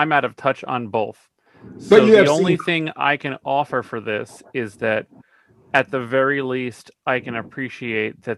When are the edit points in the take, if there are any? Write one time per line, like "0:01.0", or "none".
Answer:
none